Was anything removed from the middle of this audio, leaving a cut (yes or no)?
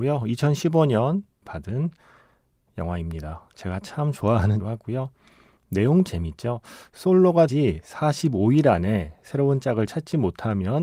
yes